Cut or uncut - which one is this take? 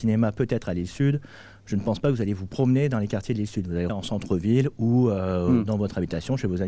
cut